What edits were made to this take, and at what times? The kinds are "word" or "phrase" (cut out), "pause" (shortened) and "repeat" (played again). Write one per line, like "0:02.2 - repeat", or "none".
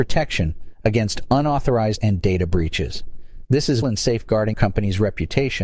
0:02.0 - word
0:03.8 - word
0:04.5 - word